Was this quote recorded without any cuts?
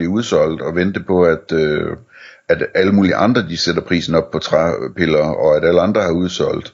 yes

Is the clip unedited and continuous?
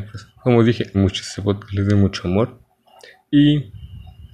no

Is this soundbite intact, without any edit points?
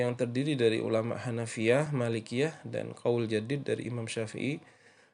yes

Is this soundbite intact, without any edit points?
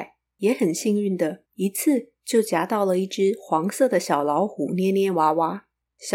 no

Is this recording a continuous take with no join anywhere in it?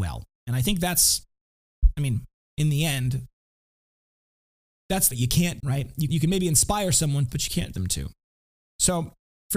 no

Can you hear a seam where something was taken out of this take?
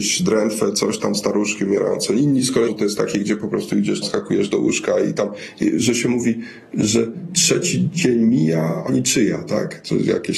yes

